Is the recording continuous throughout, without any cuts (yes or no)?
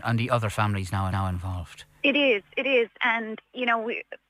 no